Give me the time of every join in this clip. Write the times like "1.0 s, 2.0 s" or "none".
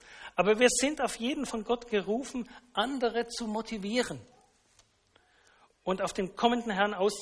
1.5 s